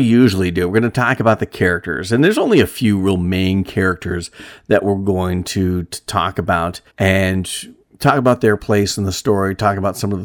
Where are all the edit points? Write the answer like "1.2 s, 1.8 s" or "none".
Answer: 6.9 s

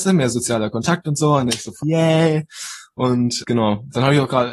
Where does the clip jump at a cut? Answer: 1.8 s, 3.4 s

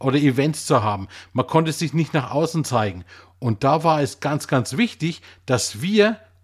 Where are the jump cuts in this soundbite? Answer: none

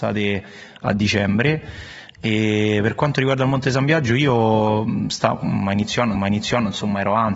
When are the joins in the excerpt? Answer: 6.1 s

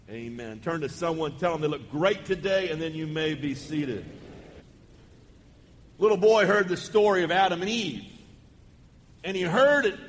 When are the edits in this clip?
none

